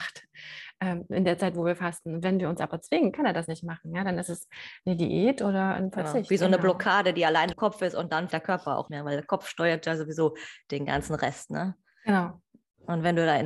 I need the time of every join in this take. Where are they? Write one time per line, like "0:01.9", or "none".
0:07.5
0:08.3
0:08.9